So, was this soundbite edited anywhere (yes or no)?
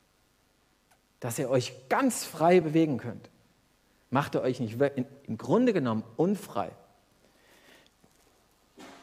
no